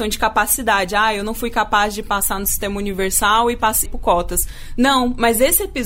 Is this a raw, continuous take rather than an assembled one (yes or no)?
no